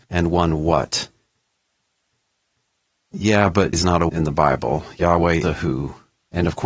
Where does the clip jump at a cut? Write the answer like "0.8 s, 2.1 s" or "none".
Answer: 3.7 s, 4.1 s, 5.4 s